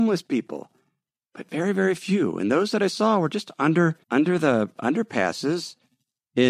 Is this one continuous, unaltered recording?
no; 1 cut; at 4.0 s

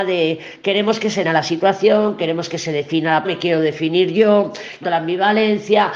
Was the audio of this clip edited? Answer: yes; 3 cuts; at 1.2 s, 3.2 s, 4.8 s

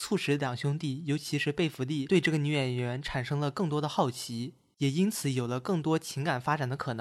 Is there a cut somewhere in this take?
no; 0 cuts

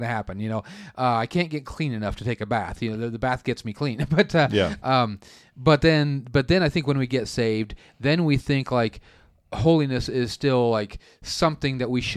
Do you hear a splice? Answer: no; 0 cuts

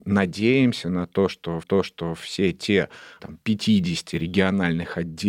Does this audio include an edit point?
yes; 2 cuts; at 1.6 s, 3.2 s

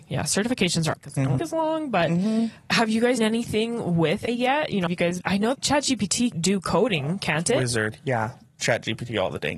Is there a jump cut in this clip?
yes; 9 cuts; at 0.9 s, 1.4 s, 3.2 s, 4.3 s, 4.9 s, 5.2 s, 5.5 s, 6.3 s, 8.6 s

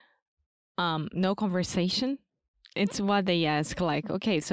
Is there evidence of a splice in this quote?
yes; 2 cuts; at 1.1 s, 2.9 s

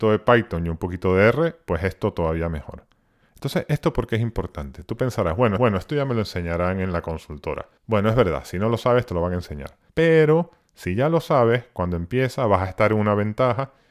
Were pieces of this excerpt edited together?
yes; 3 cuts; at 5.6 s, 7.8 s, 9.9 s

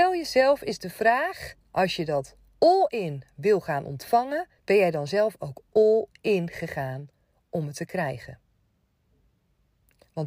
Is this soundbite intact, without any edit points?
no; 2 cuts; at 1.6 s, 4.6 s

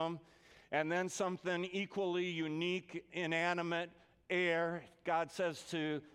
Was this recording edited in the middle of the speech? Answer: no; 0 cuts

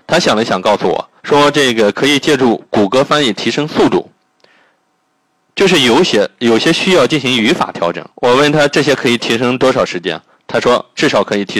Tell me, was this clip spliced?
yes; 2 cuts; at 1.2 s, 8.1 s

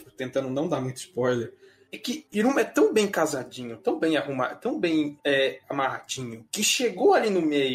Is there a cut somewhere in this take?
yes; 1 cut; at 5.2 s

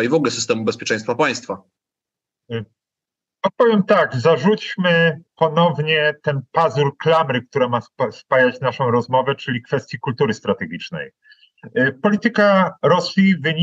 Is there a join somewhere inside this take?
yes; 1 cut; at 5.3 s

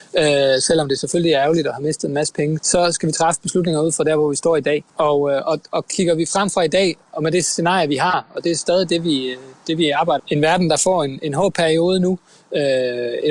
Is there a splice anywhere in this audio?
yes; 4 cuts; at 2.6 s, 4.9 s, 5.7 s, 10.2 s

